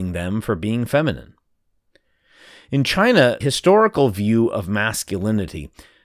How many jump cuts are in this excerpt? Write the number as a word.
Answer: one